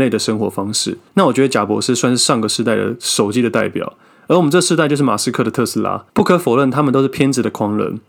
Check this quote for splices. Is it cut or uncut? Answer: cut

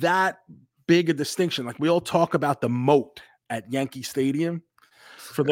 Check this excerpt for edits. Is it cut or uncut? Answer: uncut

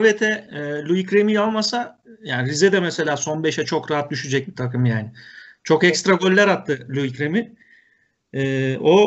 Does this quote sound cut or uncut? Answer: uncut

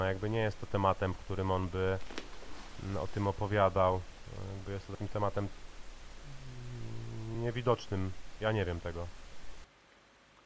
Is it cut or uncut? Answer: uncut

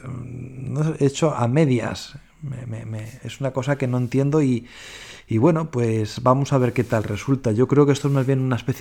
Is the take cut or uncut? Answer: uncut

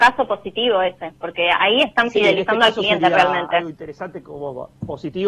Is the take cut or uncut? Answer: uncut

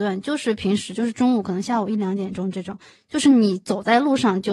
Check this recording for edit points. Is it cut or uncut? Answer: uncut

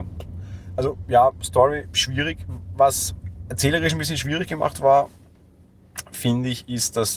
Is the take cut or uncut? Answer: uncut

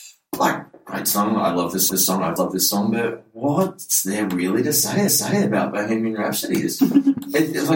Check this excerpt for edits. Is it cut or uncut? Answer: cut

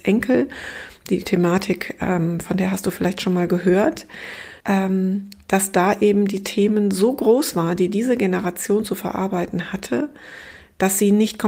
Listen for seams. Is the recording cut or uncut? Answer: cut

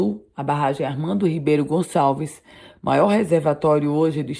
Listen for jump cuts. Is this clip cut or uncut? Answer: uncut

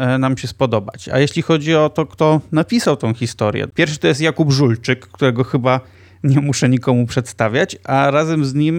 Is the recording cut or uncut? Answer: uncut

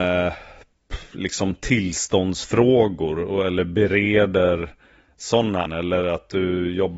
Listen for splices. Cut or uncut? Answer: cut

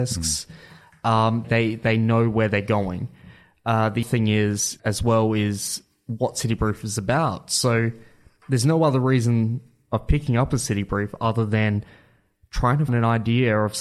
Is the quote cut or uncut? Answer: cut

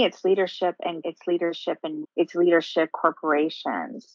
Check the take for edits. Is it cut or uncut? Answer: cut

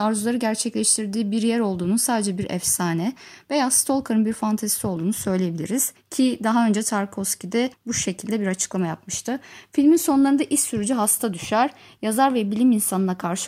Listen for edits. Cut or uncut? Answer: uncut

